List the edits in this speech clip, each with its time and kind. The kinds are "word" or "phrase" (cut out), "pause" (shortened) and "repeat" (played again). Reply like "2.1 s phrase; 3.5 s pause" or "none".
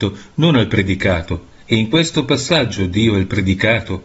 1.6 s pause